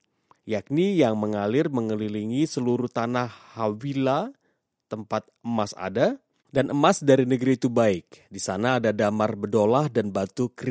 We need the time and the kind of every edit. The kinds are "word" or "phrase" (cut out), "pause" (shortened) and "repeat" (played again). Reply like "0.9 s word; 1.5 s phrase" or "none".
5.4 s pause; 6.4 s pause; 8.3 s pause